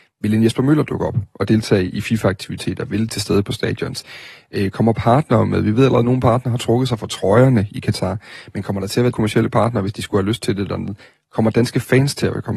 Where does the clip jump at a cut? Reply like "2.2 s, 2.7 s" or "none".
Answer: 3.1 s, 9.1 s